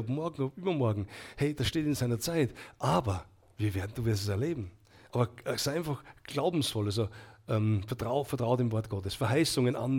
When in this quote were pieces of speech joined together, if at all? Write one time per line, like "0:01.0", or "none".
none